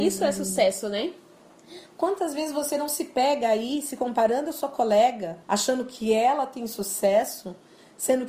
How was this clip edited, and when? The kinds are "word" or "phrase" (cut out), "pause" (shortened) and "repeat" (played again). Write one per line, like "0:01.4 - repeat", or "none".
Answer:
0:05.4 - pause